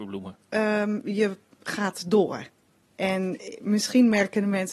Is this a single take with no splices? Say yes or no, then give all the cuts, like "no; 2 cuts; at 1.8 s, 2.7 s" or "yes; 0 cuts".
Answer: yes; 0 cuts